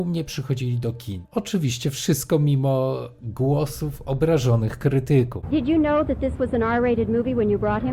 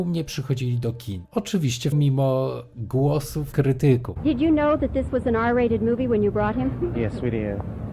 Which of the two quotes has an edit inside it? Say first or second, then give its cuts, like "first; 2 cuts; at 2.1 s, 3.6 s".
second; 2 cuts; at 1.9 s, 3.5 s